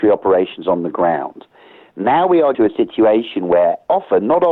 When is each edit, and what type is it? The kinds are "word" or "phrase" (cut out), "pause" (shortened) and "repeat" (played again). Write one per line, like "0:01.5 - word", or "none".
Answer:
0:02.5 - word